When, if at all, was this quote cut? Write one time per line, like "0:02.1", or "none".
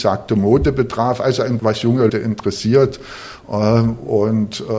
0:01.6
0:02.1